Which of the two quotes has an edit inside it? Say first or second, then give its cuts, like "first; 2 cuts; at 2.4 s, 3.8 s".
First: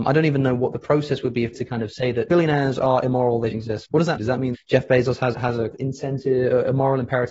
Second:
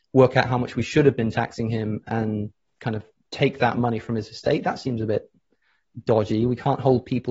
first; 8 cuts; at 1.5 s, 2.3 s, 3.5 s, 3.9 s, 4.2 s, 4.5 s, 5.3 s, 5.7 s